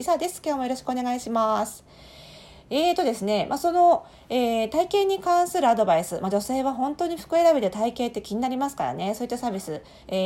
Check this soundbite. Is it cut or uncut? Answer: uncut